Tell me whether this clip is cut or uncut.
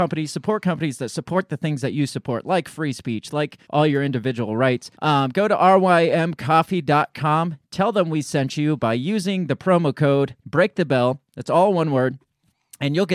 cut